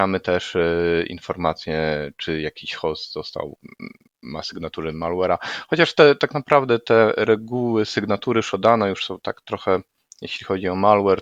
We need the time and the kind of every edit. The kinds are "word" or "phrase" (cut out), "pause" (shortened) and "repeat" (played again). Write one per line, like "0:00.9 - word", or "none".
0:04.1 - pause